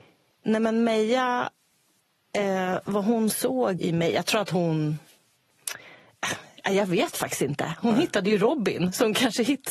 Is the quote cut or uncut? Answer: cut